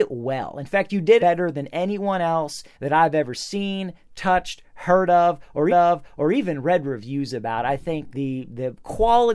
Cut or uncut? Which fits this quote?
cut